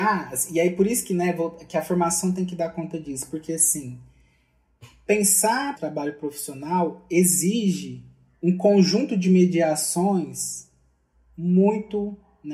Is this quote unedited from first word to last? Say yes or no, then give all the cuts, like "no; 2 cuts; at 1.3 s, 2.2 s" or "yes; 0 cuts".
no; 1 cut; at 5.8 s